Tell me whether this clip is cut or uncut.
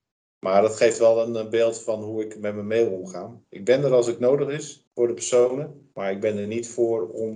cut